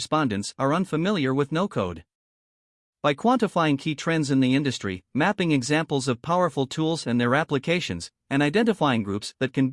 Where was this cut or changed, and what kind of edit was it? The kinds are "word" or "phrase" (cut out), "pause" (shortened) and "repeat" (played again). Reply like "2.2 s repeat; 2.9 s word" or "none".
none